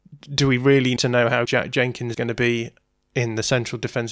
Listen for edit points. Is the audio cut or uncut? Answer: cut